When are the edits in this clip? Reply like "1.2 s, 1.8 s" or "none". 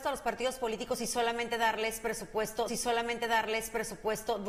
2.7 s